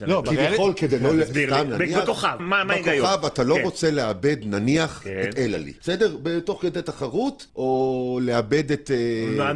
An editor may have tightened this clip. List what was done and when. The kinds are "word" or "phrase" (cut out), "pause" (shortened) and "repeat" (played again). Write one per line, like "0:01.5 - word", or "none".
0:02.4 - word
0:05.8 - pause
0:07.5 - pause